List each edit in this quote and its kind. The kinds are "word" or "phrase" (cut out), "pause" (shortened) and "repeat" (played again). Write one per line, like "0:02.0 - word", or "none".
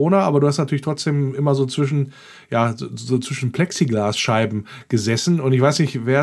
none

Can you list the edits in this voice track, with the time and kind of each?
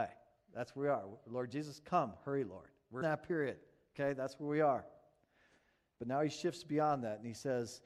0:03.0 - word

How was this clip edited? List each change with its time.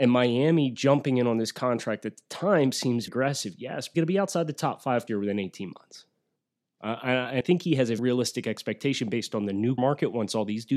0:03.1 - word
0:03.9 - word
0:05.1 - word
0:07.4 - word
0:08.0 - word
0:09.8 - word

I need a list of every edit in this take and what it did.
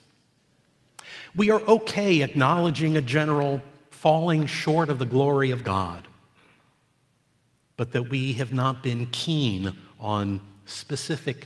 none

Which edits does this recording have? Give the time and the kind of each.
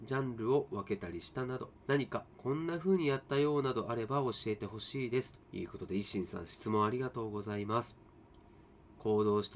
0:01.8 - pause
0:02.3 - pause
0:05.4 - pause

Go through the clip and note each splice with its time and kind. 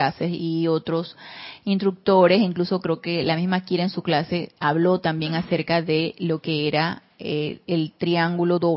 0:04.6 - pause

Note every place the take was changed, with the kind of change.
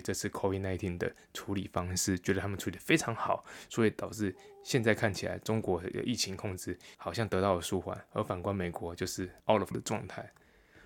0:06.9 - pause
0:09.4 - pause
0:09.7 - word

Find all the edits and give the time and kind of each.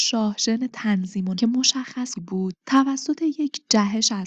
0:01.4 - word
0:02.1 - phrase

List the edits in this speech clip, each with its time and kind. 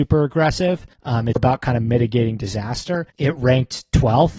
0:00.9 - pause
0:01.4 - word
0:03.1 - pause

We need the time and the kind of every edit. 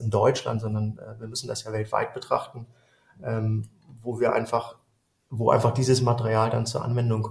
none

